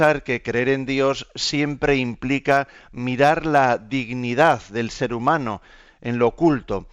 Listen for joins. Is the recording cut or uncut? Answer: uncut